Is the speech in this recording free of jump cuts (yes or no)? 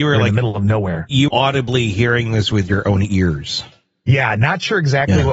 no